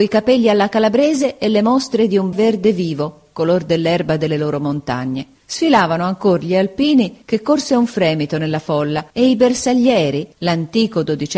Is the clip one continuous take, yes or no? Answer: no